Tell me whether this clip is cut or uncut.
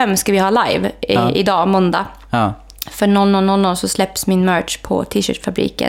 uncut